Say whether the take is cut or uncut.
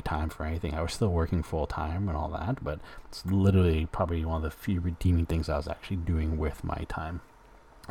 uncut